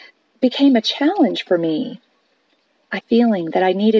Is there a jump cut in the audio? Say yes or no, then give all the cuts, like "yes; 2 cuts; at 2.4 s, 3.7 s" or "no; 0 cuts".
yes; 1 cut; at 3.0 s